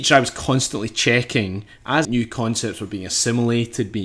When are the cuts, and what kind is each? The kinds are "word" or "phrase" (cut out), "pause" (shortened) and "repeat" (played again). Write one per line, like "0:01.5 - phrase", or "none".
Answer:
0:02.0 - phrase